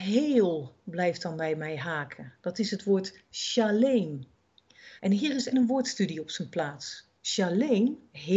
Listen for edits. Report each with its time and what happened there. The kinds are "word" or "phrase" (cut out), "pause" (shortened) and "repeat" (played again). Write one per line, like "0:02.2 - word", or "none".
0:05.0 - pause
0:05.5 - word
0:07.2 - pause